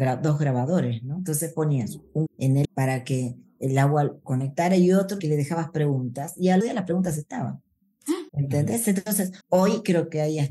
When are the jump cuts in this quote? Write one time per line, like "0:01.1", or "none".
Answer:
0:02.3
0:02.6
0:04.2
0:05.2
0:06.6
0:08.3
0:09.4